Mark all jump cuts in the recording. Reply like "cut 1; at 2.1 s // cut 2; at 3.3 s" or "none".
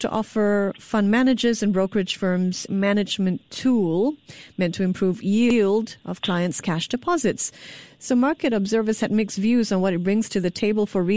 cut 1; at 2.7 s